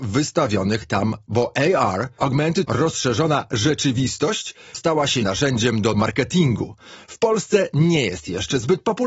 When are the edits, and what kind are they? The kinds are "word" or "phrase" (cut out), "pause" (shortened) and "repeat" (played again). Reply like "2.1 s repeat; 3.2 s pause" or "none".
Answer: 1.3 s word; 2.2 s word; 2.6 s word; 4.7 s word; 5.2 s word; 5.9 s word